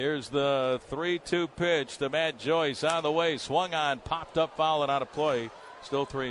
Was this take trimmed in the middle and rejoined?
no; 0 cuts

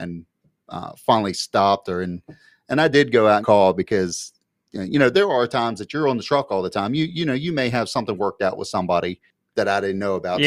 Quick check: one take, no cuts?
no; 2 cuts; at 3.4 s, 5.1 s

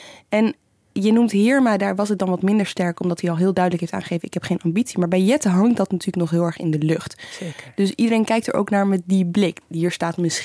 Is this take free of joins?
yes; 0 cuts

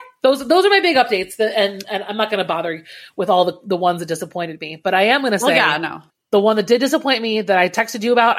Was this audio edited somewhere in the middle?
yes; 1 cut; at 6.1 s

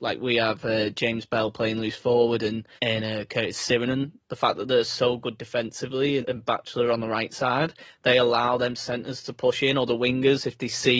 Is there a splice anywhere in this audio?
yes; 2 cuts; at 2.8 s, 6.2 s

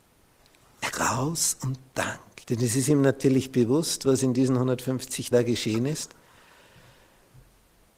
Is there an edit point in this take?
yes; 3 cuts; at 0.9 s, 2.4 s, 5.3 s

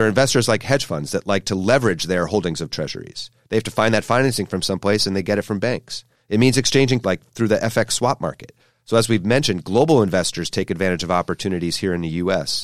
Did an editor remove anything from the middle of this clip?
yes; 1 cut; at 7.0 s

